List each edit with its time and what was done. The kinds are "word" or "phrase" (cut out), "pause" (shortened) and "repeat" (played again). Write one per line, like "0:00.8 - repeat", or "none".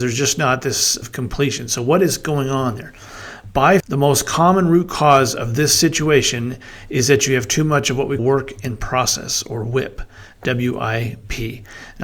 0:01.0 - word
0:03.8 - word
0:08.2 - word